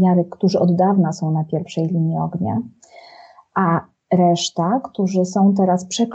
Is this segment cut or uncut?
uncut